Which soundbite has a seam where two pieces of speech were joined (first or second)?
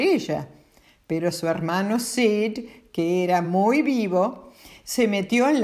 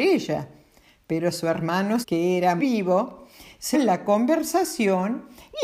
second